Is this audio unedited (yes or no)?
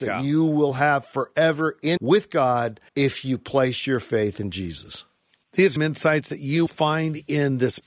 no